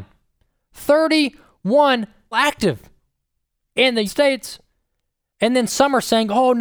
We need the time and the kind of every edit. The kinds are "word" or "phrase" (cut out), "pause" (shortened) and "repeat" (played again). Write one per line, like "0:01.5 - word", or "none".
0:02.3 - phrase
0:04.1 - word